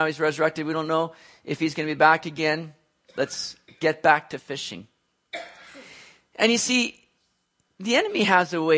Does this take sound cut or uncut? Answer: uncut